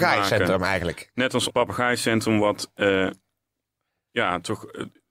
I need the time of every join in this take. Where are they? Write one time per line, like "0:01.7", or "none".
0:01.5